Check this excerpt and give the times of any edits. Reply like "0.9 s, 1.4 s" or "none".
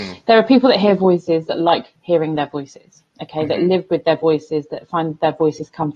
none